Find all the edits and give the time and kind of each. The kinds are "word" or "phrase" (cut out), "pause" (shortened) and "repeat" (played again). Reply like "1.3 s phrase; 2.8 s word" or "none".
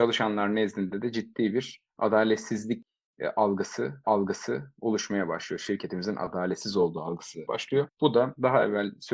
4.0 s repeat; 7.5 s word; 7.9 s pause

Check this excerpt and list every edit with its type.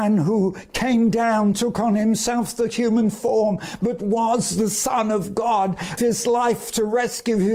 6.0 s phrase

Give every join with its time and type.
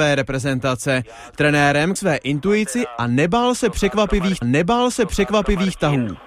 2.0 s phrase; 4.4 s repeat

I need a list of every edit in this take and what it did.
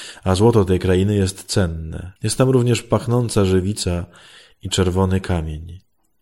2.2 s pause

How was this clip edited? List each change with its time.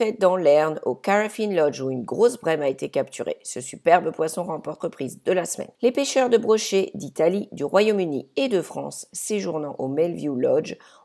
4.8 s word; 5.7 s pause

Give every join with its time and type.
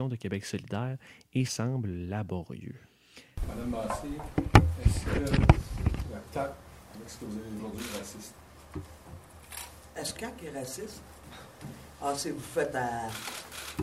1.5 s word; 7.6 s word; 10.2 s word; 12.7 s word

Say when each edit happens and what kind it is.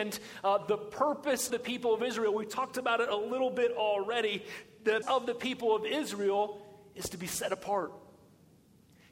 1.5 s word; 5.0 s word

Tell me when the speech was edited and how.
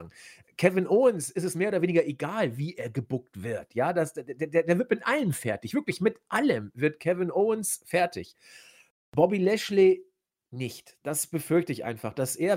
none

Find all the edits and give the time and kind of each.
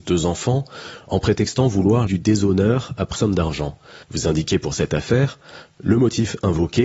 2.1 s phrase; 3.2 s phrase; 4.0 s pause

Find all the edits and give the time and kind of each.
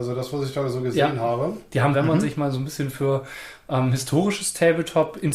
1.9 s phrase

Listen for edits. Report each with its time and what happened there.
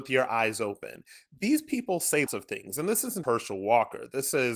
2.3 s word; 3.2 s word

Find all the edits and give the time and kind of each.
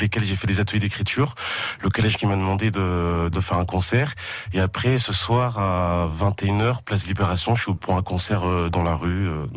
2.2 s word; 3.3 s word; 7.8 s phrase

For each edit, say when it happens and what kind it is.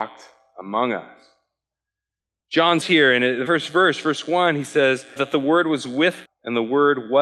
2.8 s word; 3.5 s word; 5.2 s word; 6.2 s word

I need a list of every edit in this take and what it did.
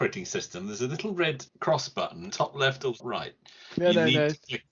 1.5 s pause; 2.3 s phrase; 3.0 s word

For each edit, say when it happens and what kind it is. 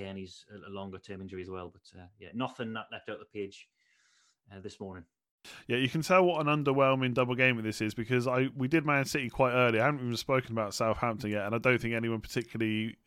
none

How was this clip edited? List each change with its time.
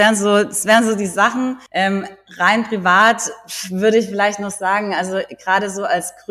1.7 s pause

